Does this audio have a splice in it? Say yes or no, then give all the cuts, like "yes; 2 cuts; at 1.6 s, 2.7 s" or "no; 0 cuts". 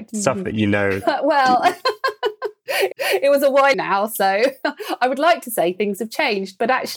yes; 2 cuts; at 2.9 s, 3.7 s